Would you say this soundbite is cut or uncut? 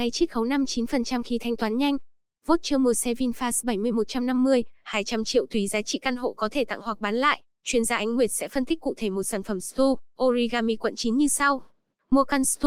uncut